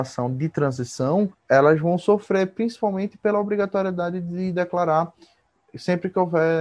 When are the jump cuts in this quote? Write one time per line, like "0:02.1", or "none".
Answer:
0:01.3